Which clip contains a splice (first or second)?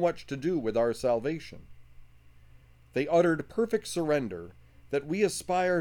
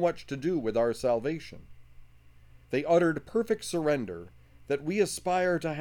second